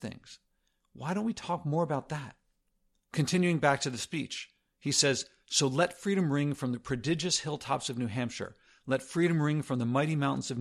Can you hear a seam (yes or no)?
no